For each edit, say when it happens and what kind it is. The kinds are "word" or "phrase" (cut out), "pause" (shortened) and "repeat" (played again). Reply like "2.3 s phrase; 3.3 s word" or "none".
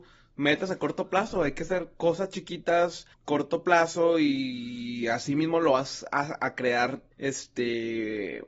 3.1 s pause; 7.1 s pause

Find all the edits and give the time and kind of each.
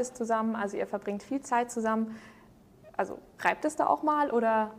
none

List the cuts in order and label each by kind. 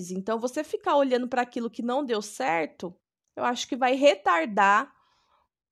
3.0 s pause

